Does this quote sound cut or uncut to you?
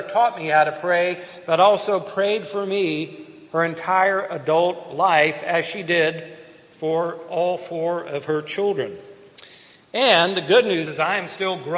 cut